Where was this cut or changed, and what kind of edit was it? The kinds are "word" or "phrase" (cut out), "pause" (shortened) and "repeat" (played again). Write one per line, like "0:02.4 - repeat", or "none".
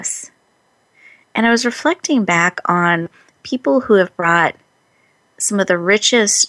none